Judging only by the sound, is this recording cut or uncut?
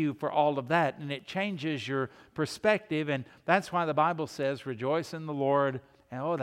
uncut